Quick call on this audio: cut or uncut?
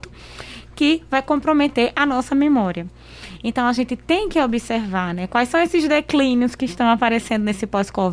uncut